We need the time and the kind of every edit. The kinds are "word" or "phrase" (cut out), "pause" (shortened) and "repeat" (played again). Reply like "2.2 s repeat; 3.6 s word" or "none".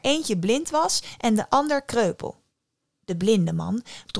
none

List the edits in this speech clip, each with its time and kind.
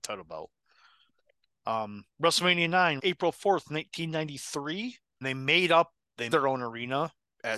3.0 s word; 5.2 s word; 6.3 s word

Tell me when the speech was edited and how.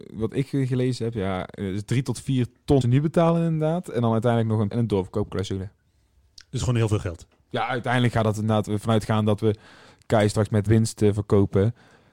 2.8 s word; 4.7 s word; 10.7 s word

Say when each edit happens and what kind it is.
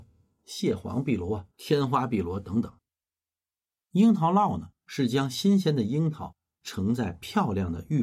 1.5 s pause; 4.8 s pause

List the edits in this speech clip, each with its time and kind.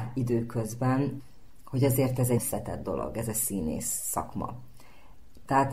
2.4 s word

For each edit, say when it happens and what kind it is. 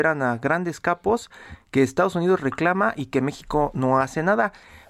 none

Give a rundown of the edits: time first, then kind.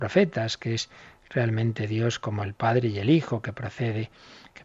none

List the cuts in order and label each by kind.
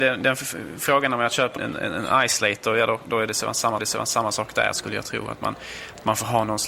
1.6 s word; 3.8 s repeat

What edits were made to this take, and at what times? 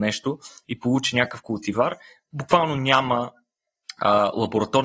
none

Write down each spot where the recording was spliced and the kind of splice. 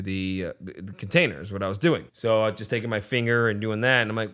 2.1 s pause

